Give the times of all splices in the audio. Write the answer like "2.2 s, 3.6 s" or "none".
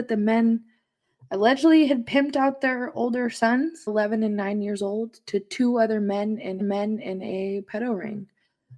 3.9 s, 6.6 s